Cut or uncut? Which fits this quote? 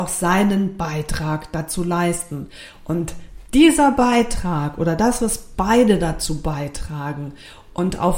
uncut